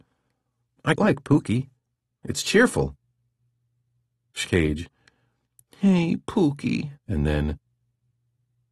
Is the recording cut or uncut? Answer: cut